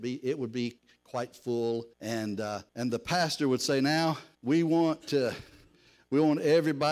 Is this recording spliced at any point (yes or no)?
yes